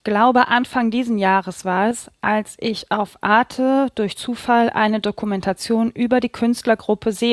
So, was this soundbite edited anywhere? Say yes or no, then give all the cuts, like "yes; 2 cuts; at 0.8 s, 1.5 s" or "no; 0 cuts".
no; 0 cuts